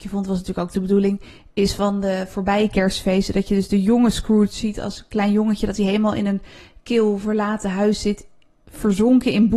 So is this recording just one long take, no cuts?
yes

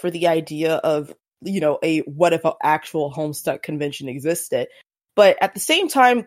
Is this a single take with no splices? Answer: yes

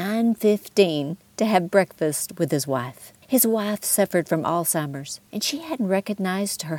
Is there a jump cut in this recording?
yes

